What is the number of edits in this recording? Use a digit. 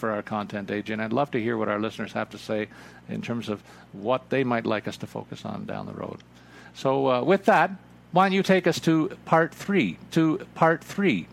1